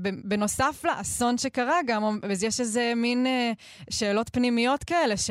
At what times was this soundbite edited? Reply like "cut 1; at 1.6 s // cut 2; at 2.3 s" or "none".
none